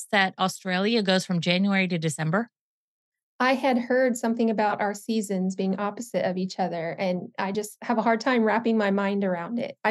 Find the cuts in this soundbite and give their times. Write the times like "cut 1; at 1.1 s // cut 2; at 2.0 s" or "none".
none